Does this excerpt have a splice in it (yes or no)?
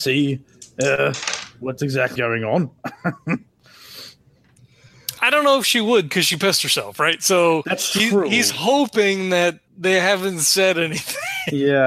yes